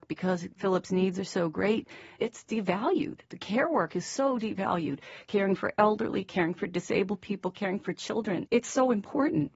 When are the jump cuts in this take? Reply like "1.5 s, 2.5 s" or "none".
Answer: 8.5 s